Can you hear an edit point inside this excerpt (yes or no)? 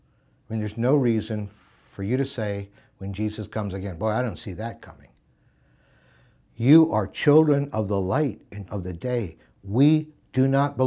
yes